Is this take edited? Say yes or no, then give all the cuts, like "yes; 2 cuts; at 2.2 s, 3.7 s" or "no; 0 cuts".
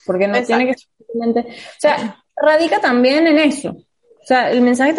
yes; 1 cut; at 2.3 s